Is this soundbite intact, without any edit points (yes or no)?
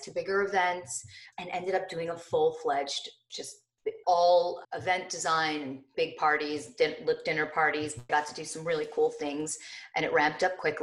no